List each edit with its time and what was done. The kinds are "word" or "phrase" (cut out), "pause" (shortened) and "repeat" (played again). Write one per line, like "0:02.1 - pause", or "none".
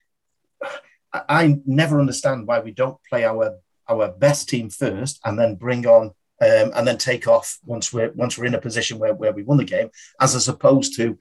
0:06.2 - pause